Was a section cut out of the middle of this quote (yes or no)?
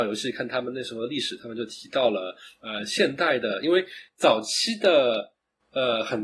no